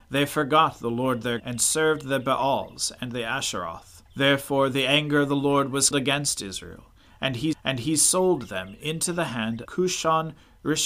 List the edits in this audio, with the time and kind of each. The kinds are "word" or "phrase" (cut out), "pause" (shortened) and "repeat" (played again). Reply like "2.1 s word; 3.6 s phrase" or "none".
1.4 s word; 4.1 s pause; 5.9 s word; 7.5 s repeat; 9.6 s word